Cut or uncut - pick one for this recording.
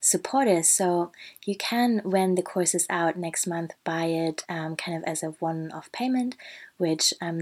uncut